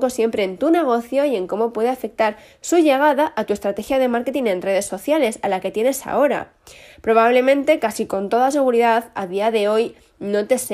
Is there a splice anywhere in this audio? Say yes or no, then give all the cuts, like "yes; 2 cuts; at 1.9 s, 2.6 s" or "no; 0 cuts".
no; 0 cuts